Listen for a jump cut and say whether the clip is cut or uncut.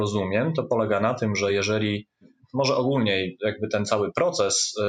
uncut